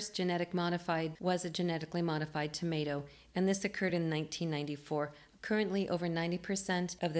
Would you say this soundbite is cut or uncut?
uncut